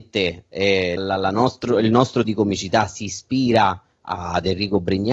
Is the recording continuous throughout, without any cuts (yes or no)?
no